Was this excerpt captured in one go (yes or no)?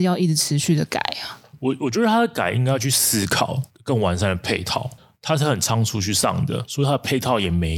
yes